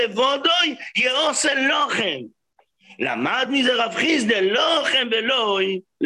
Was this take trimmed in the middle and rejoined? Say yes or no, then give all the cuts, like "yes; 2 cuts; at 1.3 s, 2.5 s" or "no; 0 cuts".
no; 0 cuts